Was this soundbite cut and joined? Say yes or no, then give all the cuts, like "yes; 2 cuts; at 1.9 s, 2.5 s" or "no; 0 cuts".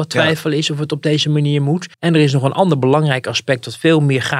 yes; 1 cut; at 1.9 s